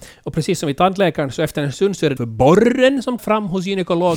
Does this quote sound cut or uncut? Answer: cut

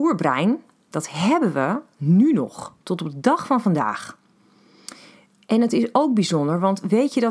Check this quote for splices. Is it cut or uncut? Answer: uncut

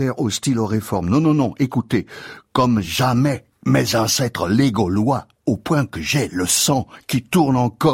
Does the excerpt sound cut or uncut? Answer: uncut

